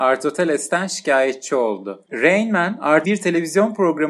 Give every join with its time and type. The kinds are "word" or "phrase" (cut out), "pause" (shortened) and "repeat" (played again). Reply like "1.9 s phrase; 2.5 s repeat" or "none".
3.0 s word